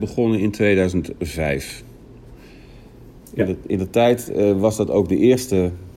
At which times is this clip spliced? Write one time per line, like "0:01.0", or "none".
none